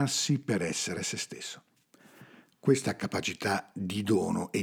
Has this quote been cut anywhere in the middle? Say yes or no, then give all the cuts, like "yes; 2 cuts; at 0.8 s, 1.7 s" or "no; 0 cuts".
no; 0 cuts